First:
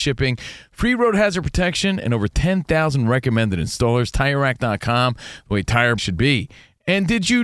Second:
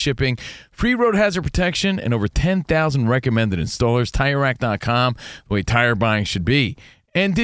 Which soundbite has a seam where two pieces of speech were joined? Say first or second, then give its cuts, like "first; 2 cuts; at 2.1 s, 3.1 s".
first; 1 cut; at 6.0 s